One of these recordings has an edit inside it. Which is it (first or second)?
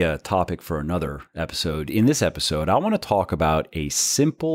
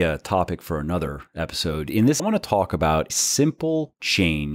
second